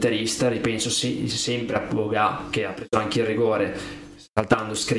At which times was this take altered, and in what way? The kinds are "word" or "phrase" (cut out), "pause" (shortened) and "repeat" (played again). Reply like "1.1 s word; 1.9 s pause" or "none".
none